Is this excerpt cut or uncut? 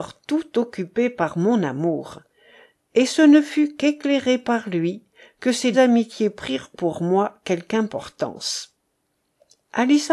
cut